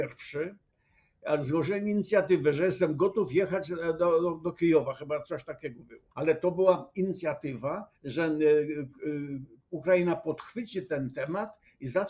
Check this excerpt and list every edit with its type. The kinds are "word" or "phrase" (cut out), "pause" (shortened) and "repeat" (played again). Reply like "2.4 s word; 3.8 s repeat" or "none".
6.1 s pause; 7.9 s pause